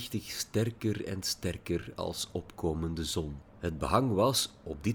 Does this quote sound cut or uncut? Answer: cut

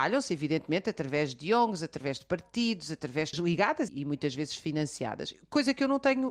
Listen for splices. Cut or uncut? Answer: cut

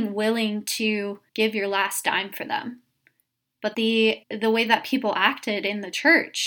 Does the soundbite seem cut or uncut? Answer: cut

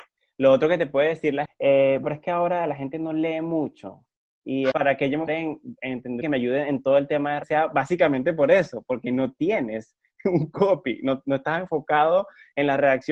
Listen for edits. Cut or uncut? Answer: cut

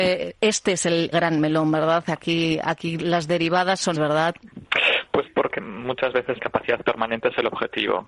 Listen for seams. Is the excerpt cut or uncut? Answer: cut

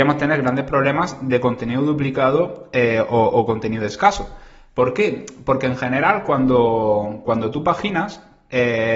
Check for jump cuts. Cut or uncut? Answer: uncut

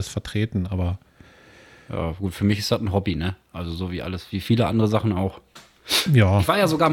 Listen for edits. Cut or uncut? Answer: uncut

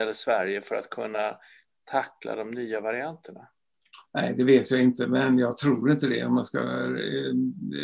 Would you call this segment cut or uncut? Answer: uncut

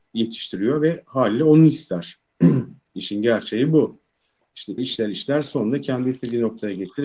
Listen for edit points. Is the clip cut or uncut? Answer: cut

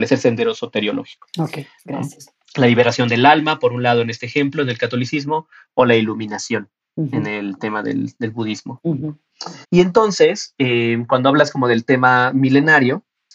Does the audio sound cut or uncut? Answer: cut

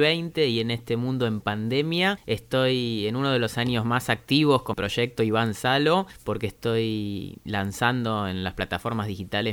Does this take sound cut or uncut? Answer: cut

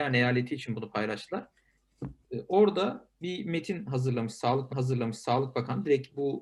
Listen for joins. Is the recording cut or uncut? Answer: cut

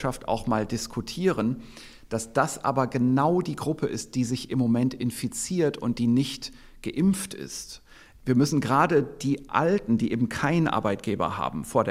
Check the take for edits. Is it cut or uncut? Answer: uncut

